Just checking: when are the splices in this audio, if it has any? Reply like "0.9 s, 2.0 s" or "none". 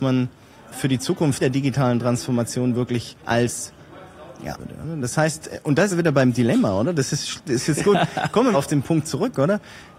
1.4 s, 3.2 s, 4.6 s, 5.9 s, 7.8 s, 8.5 s